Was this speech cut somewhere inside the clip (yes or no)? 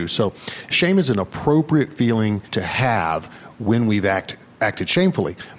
yes